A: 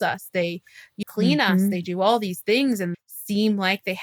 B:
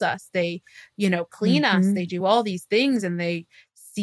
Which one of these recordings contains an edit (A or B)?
A